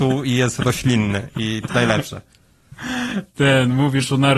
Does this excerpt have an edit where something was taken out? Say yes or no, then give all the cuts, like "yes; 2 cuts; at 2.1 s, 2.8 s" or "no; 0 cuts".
yes; 1 cut; at 1.7 s